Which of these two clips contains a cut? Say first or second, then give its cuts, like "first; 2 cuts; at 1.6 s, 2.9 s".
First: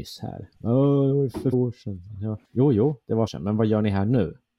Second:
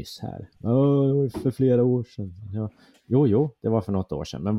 first; 3 cuts; at 1.5 s, 2.4 s, 3.3 s